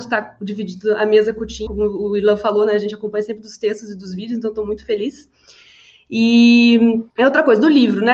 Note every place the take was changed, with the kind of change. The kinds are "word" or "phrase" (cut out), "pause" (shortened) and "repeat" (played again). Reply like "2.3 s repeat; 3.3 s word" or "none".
1.7 s word; 7.1 s pause

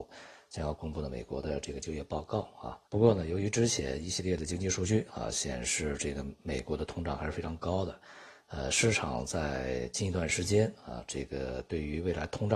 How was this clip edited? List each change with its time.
2.8 s pause

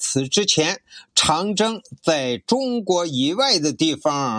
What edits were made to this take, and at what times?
none

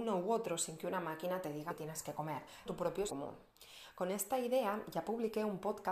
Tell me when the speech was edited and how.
1.7 s word; 2.7 s word; 3.1 s word

